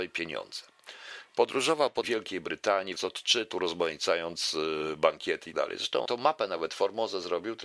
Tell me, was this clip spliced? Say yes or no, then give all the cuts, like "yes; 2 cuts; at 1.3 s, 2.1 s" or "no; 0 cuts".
yes; 5 cuts; at 2.0 s, 3.0 s, 3.5 s, 5.5 s, 6.1 s